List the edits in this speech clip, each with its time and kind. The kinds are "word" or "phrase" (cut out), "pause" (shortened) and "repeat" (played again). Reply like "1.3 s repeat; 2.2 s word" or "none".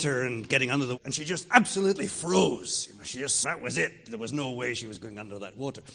1.0 s word; 3.4 s phrase